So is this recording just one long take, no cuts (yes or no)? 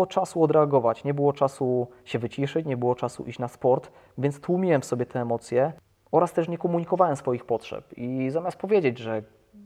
yes